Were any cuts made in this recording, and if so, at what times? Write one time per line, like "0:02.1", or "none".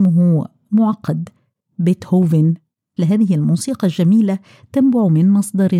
0:03.0